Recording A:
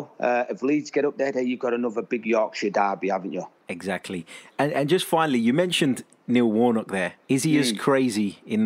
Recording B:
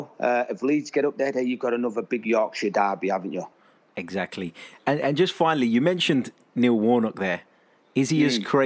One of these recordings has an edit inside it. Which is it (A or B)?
A